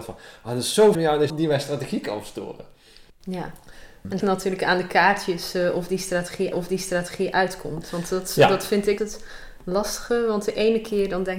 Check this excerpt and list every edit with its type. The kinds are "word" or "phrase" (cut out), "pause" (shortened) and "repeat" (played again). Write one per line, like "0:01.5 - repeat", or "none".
0:00.9 - word
0:01.3 - word
0:03.1 - pause
0:04.2 - word
0:06.5 - repeat
0:09.0 - word